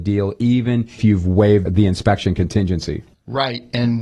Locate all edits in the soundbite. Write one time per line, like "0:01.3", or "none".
0:01.0
0:01.7